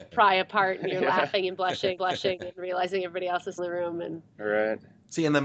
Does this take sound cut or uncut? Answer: cut